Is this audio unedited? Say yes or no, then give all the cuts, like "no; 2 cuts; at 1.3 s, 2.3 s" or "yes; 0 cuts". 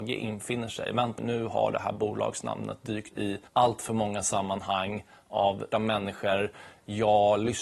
no; 4 cuts; at 1.2 s, 3.1 s, 3.5 s, 5.7 s